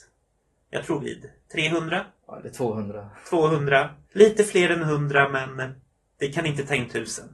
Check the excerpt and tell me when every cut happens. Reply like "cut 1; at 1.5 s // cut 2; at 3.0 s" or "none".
cut 1; at 1.0 s // cut 2; at 2.2 s // cut 3; at 4.0 s

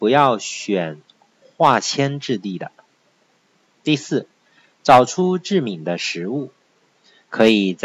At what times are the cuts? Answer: none

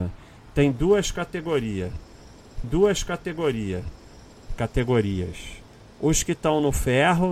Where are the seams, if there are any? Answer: cut 1; at 2.6 s

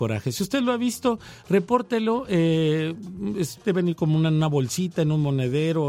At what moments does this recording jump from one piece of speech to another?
cut 1; at 3.6 s

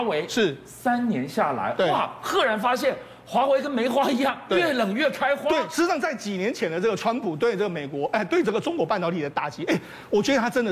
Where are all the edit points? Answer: none

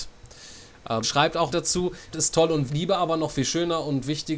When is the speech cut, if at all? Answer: cut 1; at 1.0 s // cut 2; at 1.5 s // cut 3; at 2.1 s // cut 4; at 2.7 s

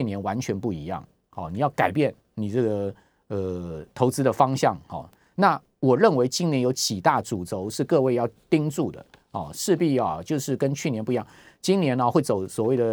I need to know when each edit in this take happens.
none

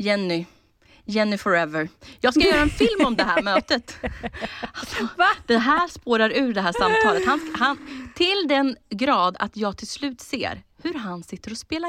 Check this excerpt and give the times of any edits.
none

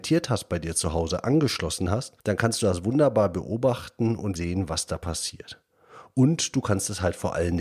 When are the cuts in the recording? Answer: cut 1; at 2.2 s // cut 2; at 4.4 s

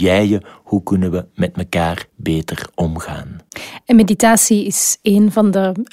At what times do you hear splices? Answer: cut 1; at 2.1 s

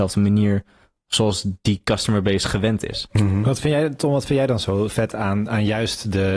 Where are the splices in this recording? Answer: cut 1; at 4.9 s

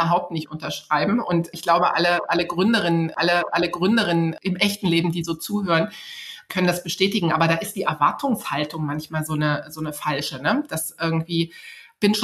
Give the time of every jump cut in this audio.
cut 1; at 3.2 s

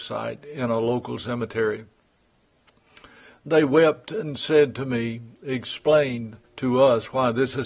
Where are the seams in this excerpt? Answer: cut 1; at 6.4 s

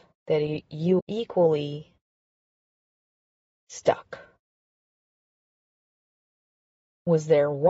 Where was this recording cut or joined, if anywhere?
cut 1; at 1.0 s

